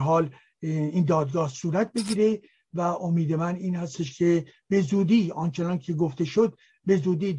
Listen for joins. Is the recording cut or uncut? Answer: uncut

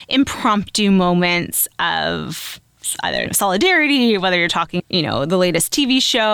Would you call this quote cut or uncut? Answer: cut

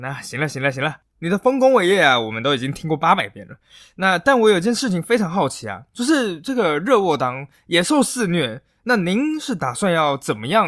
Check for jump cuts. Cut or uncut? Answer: uncut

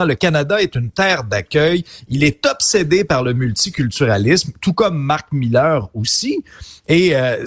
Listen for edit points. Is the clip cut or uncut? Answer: uncut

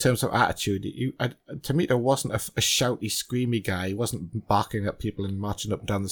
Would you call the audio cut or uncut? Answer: uncut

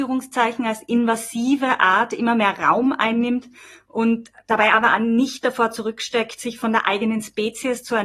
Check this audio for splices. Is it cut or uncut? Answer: uncut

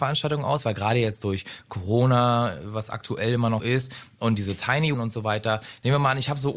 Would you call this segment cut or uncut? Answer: cut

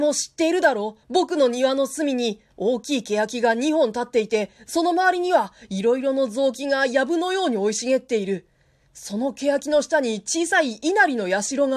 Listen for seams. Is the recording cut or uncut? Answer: cut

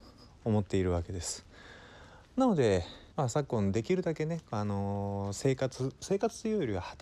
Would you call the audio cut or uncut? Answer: cut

